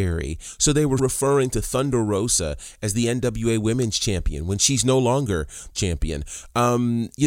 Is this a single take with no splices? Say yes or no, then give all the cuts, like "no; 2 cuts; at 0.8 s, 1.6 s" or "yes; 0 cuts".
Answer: no; 2 cuts; at 1.0 s, 5.7 s